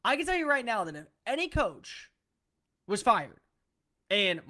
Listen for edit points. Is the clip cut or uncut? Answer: uncut